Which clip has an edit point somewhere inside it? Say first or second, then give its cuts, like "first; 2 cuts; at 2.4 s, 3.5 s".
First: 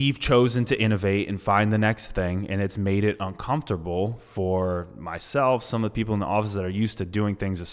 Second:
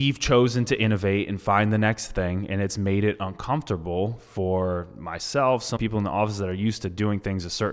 second; 1 cut; at 5.8 s